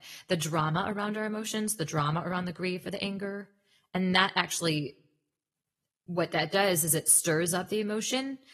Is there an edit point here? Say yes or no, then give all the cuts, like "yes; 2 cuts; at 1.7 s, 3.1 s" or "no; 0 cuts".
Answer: no; 0 cuts